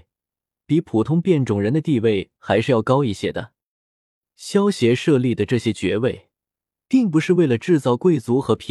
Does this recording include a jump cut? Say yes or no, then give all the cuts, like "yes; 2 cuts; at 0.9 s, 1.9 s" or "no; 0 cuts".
no; 0 cuts